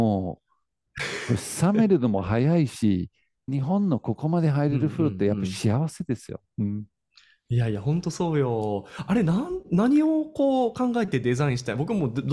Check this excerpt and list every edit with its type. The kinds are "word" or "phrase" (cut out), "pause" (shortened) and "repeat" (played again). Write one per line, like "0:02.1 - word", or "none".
0:03.5 - word